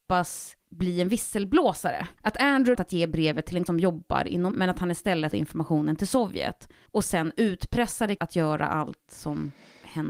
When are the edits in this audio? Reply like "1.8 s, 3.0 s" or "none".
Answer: 2.2 s, 2.7 s, 3.7 s, 4.5 s, 5.3 s, 6.9 s, 8.2 s